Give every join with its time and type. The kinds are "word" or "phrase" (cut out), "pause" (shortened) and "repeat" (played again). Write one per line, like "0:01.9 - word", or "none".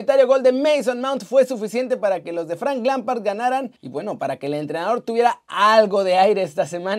0:03.8 - pause